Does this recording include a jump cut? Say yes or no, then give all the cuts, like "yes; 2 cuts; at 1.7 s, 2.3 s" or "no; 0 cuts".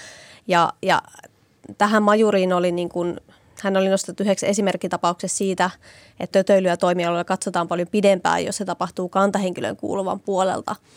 yes; 1 cut; at 6.3 s